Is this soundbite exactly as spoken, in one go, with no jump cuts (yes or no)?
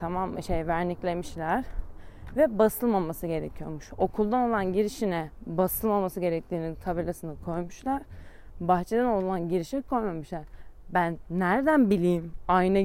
yes